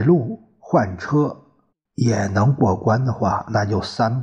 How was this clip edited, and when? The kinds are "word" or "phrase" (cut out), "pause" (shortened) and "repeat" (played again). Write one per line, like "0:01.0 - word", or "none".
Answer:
0:01.7 - pause